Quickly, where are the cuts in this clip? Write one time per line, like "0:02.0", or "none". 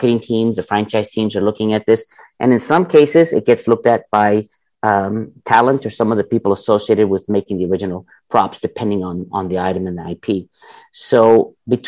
none